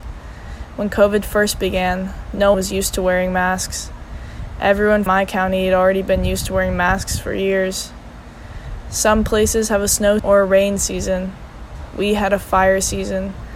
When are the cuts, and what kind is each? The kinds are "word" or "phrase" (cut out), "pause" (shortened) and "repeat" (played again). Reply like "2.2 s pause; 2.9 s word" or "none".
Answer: 2.5 s word; 5.1 s word; 10.2 s word